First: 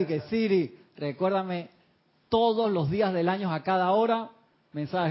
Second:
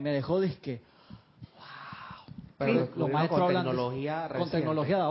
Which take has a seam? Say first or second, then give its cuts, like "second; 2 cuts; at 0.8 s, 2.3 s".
second; 1 cut; at 2.5 s